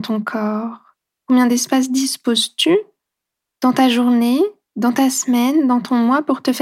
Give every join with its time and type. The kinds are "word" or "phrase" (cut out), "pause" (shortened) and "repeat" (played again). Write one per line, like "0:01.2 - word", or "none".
none